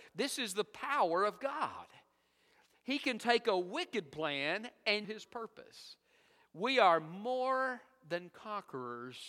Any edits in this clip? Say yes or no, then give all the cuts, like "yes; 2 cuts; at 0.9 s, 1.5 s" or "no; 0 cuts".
yes; 1 cut; at 5.0 s